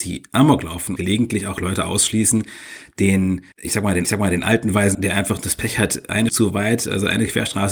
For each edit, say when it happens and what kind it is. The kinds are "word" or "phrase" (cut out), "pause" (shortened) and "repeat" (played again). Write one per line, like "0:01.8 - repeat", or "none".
0:01.0 - word
0:03.5 - pause
0:04.0 - repeat
0:04.9 - word
0:06.3 - word